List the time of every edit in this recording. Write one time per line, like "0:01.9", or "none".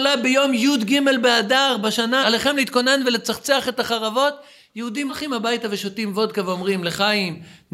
0:02.2
0:05.1